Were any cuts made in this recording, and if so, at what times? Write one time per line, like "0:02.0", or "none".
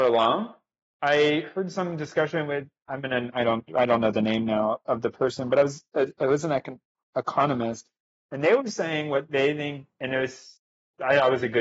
none